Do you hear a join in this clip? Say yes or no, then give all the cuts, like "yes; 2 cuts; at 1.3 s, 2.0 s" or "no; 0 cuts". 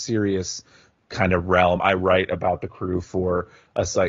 no; 0 cuts